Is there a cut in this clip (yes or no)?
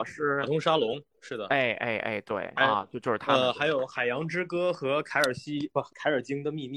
yes